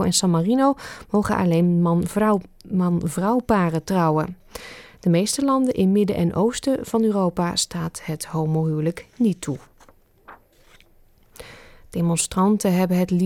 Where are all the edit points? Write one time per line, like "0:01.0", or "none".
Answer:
none